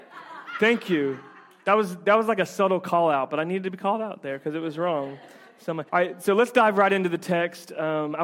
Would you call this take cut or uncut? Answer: cut